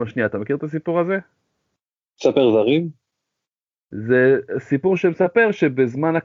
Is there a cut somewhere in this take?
no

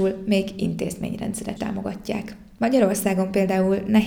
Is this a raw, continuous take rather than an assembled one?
no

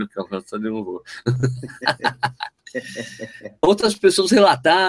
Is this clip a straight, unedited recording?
no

